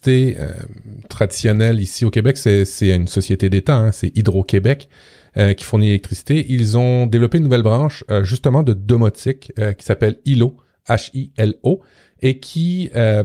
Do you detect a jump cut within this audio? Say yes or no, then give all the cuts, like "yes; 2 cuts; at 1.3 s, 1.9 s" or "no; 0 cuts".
no; 0 cuts